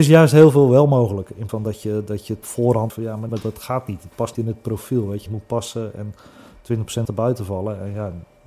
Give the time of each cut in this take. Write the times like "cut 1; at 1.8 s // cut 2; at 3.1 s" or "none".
cut 1; at 1.5 s // cut 2; at 2.4 s // cut 3; at 2.9 s // cut 4; at 3.3 s // cut 5; at 4.3 s // cut 6; at 5.3 s // cut 7; at 7.0 s